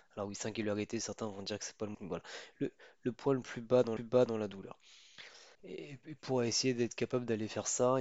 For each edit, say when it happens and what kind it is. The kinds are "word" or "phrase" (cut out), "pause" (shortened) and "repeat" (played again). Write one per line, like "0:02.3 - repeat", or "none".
0:01.9 - word
0:04.0 - repeat
0:05.5 - pause